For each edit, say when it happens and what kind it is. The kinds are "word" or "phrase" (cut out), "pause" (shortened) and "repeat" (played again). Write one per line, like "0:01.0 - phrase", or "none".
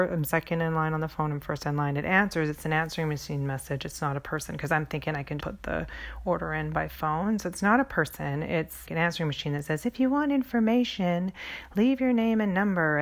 0:05.4 - word
0:08.9 - word